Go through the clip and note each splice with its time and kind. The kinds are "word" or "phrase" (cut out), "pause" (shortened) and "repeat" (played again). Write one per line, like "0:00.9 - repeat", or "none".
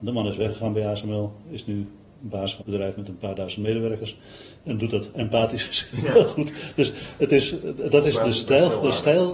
0:02.6 - word